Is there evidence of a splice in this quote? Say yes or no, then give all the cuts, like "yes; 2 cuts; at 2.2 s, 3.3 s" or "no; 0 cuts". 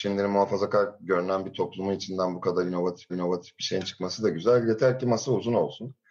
yes; 1 cut; at 3.1 s